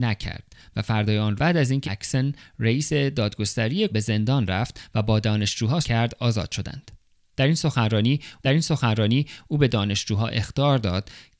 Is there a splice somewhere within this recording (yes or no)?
yes